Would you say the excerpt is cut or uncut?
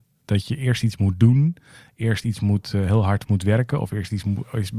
uncut